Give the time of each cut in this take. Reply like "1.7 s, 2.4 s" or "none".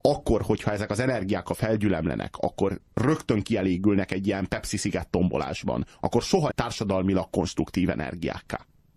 6.5 s